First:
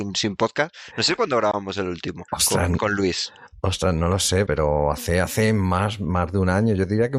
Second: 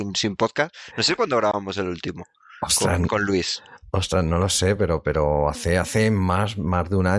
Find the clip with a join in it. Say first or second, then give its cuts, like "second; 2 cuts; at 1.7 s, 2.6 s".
first; 2 cuts; at 2.3 s, 4.5 s